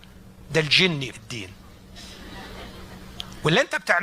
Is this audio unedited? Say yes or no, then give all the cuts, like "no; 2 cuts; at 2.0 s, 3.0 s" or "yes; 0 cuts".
no; 1 cut; at 1.1 s